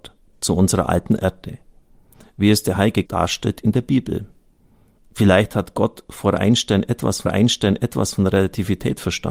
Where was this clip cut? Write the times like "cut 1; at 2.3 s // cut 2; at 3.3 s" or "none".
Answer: cut 1; at 3.0 s // cut 2; at 7.2 s